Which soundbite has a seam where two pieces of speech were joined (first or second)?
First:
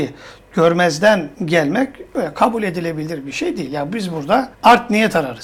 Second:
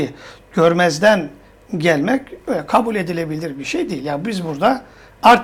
first